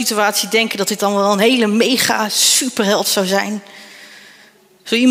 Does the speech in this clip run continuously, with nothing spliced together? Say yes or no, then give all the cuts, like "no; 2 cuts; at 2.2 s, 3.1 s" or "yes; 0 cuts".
yes; 0 cuts